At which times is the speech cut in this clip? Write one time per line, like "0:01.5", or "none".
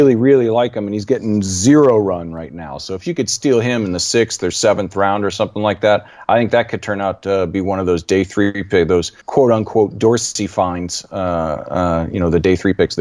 0:09.2